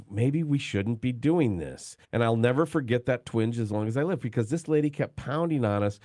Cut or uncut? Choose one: cut